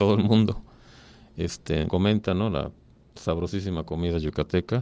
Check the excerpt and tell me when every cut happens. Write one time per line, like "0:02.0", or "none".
0:01.9